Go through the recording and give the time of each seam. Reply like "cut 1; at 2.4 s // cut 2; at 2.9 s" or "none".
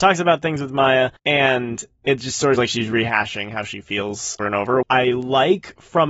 cut 1; at 1.2 s // cut 2; at 2.6 s // cut 3; at 4.4 s // cut 4; at 4.8 s